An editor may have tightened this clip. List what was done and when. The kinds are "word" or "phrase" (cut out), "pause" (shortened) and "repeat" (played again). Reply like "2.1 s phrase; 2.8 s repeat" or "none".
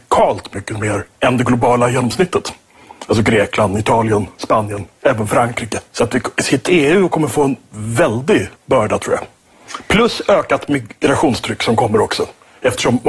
1.1 s pause; 5.9 s pause; 6.7 s word; 8.6 s pause